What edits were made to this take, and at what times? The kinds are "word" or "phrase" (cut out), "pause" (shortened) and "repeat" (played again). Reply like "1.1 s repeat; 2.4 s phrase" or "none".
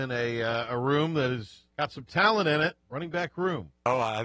1.7 s pause; 2.8 s pause